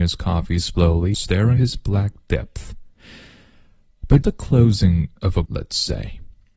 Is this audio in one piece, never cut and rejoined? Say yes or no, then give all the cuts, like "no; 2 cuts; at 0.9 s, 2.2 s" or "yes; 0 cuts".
no; 4 cuts; at 1.1 s, 1.6 s, 4.2 s, 5.5 s